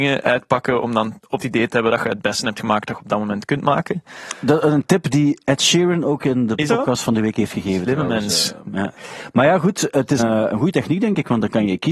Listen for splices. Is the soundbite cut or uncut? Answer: cut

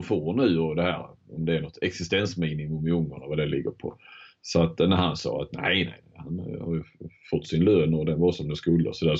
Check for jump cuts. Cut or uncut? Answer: uncut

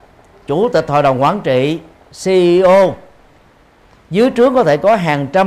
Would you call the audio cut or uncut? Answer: uncut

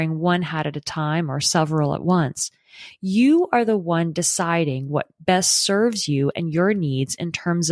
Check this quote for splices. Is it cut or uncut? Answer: uncut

